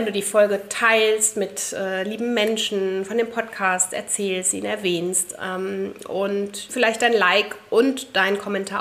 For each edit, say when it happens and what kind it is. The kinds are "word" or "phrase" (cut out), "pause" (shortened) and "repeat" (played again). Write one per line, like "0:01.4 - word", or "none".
0:06.7 - word